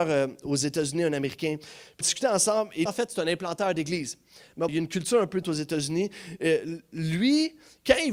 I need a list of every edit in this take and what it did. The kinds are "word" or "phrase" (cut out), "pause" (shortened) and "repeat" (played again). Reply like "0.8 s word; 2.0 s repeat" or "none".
2.0 s word; 2.9 s word; 4.7 s word; 5.4 s word

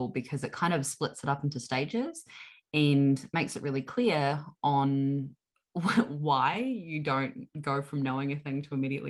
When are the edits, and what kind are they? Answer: none

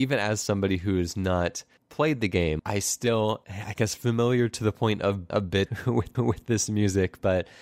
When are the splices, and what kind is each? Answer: 1.8 s pause; 2.6 s word; 3.4 s word; 5.3 s word; 5.7 s word; 6.1 s repeat

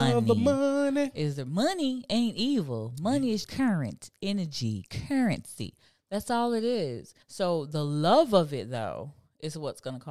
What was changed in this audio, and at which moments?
3.4 s word; 7.2 s pause

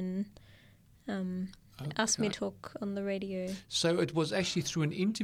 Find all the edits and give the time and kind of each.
2.3 s phrase

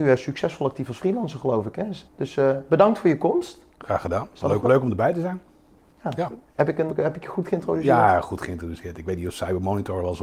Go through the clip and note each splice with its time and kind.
2.1 s pause; 3.7 s pause; 4.6 s word; 6.5 s pause; 6.9 s word

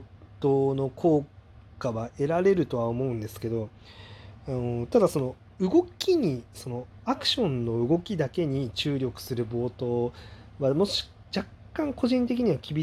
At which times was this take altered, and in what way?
none

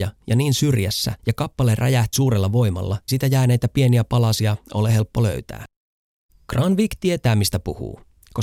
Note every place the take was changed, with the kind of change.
1.2 s pause; 2.1 s word; 3.1 s word; 6.3 s pause

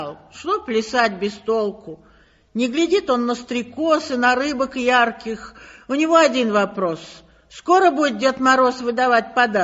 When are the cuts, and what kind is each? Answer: none

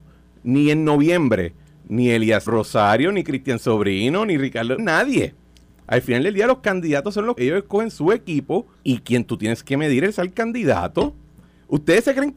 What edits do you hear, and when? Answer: 2.5 s phrase; 4.8 s word; 7.4 s word; 8.7 s pause

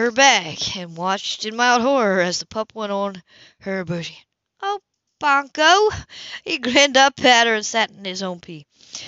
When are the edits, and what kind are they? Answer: none

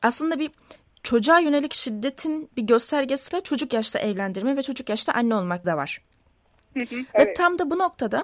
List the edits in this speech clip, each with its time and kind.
3.3 s word; 5.6 s phrase

